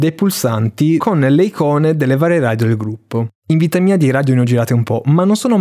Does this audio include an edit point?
no; 0 cuts

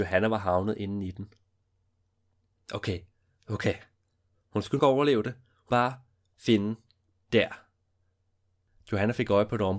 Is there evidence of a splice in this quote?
yes; 2 cuts; at 4.8 s, 5.7 s

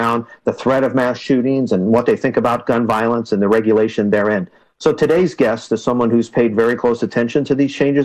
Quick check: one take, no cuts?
yes; 0 cuts

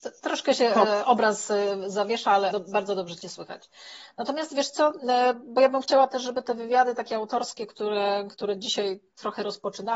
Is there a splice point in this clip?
yes; 1 cut; at 2.5 s

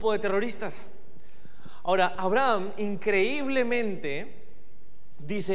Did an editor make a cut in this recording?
no; 0 cuts

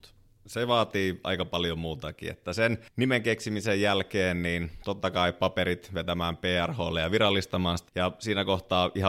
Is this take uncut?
no; 2 cuts; at 2.9 s, 7.9 s

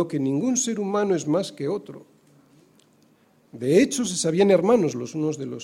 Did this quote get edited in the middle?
no; 0 cuts

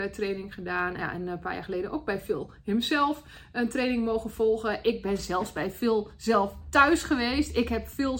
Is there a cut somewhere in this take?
yes; 1 cut; at 1.0 s

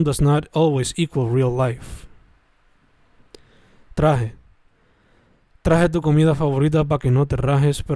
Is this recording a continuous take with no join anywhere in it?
yes; 0 cuts

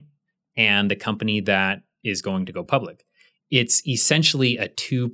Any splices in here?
no; 0 cuts

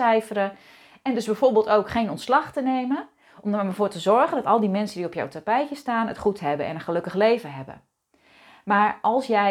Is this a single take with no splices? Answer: yes; 0 cuts

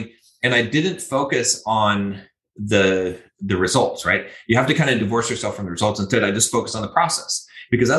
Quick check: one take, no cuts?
yes; 0 cuts

